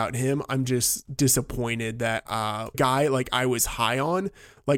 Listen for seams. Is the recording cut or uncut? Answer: cut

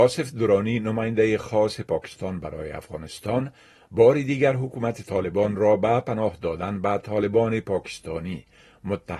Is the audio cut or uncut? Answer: uncut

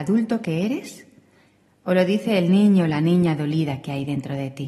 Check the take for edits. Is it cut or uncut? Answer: uncut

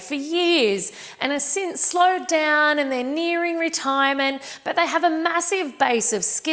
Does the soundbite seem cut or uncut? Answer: uncut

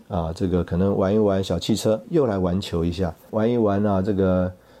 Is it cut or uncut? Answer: cut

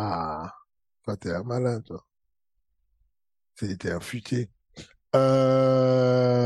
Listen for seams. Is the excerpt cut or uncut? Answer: uncut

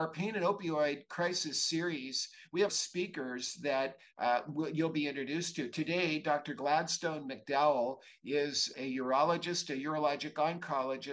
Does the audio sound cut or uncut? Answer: cut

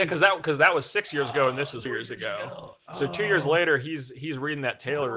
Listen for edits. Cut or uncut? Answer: cut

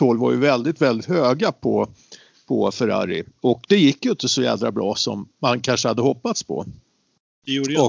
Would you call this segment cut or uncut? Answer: uncut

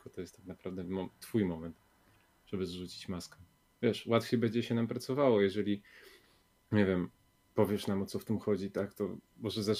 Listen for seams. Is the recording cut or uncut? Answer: uncut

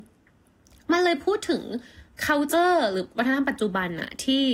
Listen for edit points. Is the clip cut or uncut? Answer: uncut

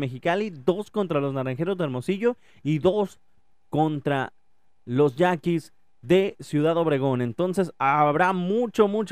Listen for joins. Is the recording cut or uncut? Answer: uncut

